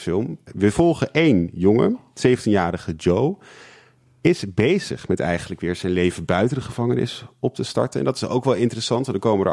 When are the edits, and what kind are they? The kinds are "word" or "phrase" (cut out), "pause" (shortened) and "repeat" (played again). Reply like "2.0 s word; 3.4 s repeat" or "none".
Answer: none